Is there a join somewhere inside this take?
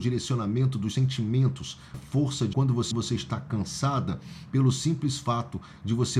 yes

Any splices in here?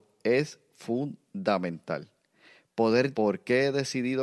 yes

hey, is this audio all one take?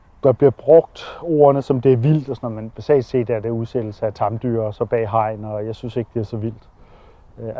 yes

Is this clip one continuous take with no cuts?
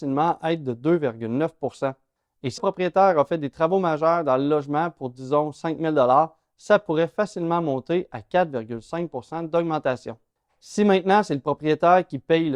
no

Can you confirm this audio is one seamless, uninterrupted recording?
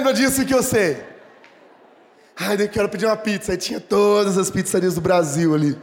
yes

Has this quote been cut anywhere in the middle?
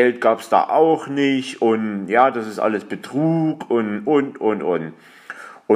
no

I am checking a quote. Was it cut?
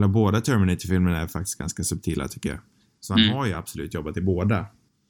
no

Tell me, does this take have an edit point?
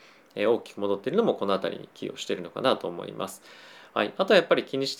no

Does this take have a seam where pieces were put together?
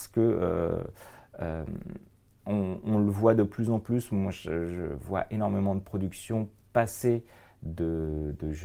no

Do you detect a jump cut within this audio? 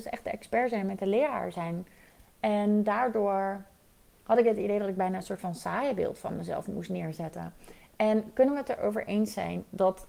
no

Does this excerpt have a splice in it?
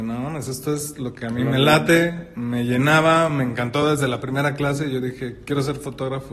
no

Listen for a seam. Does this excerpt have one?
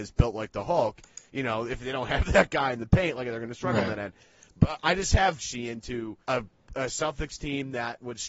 yes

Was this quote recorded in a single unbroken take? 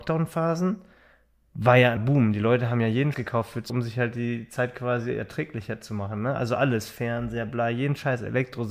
no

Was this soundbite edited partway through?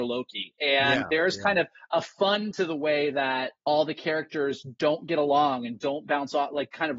yes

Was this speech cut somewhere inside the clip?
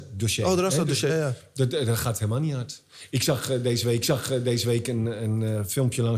yes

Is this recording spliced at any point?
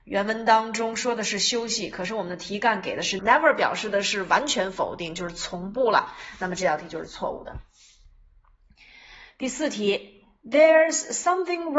yes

